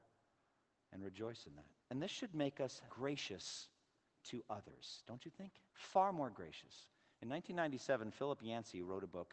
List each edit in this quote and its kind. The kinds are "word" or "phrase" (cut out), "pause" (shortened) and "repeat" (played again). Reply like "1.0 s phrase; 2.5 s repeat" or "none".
1.8 s pause; 2.9 s phrase; 5.7 s pause

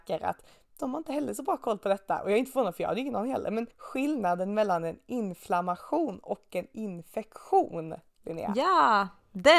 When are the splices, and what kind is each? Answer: 3.7 s pause

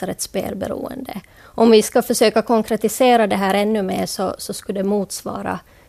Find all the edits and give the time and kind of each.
none

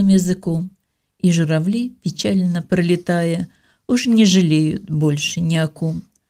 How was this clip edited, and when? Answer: none

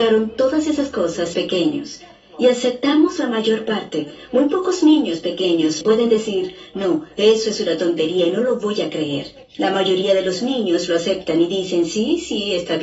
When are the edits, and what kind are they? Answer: 1.3 s phrase; 5.8 s word

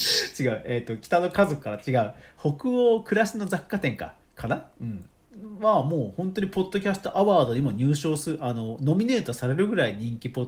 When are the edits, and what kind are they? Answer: 4.2 s pause

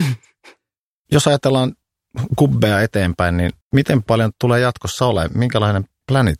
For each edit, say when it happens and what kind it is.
3.6 s pause; 4.3 s word

